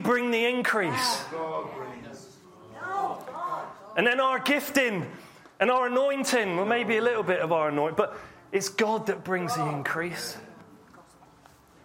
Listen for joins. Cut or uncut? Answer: uncut